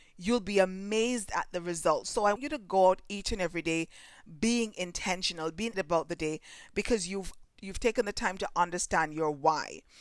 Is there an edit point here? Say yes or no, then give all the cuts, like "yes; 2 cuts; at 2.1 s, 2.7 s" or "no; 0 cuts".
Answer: yes; 3 cuts; at 2.4 s, 5.7 s, 7.4 s